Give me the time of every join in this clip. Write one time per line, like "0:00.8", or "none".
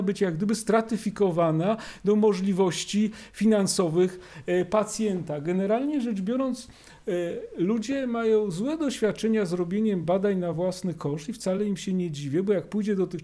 none